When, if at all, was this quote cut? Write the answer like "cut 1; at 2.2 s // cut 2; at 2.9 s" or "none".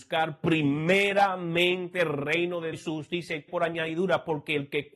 cut 1; at 2.7 s // cut 2; at 3.5 s